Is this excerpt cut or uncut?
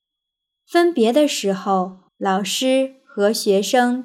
cut